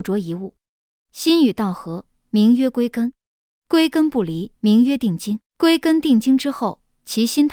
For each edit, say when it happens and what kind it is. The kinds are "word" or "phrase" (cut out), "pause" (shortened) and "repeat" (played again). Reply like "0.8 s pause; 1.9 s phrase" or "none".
4.6 s pause; 5.5 s pause